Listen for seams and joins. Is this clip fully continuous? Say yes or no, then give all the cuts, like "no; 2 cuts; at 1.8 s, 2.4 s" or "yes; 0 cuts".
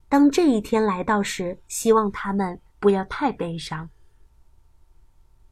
no; 2 cuts; at 1.7 s, 2.7 s